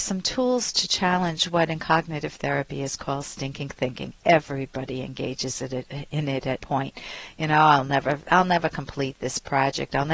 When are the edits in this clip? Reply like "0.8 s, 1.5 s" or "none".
6.6 s